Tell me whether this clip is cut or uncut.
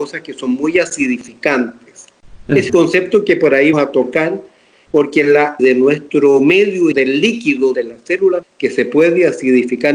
cut